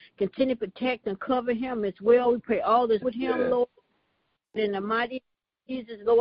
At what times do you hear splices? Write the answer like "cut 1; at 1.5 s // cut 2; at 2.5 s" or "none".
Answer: cut 1; at 3.0 s // cut 2; at 4.6 s